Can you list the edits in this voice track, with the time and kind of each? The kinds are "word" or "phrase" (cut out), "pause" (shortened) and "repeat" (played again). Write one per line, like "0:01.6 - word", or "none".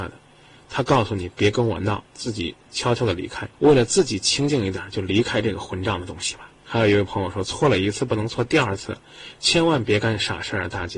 0:02.1 - pause
0:03.5 - pause